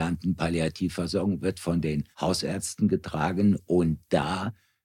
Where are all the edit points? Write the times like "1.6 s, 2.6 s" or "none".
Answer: 2.1 s